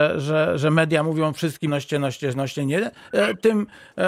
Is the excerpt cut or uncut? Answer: cut